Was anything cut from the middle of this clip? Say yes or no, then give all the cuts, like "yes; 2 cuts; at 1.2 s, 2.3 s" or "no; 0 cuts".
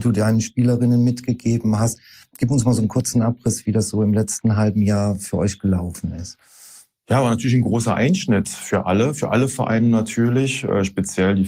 no; 0 cuts